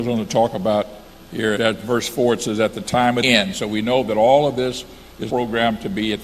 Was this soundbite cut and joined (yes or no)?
yes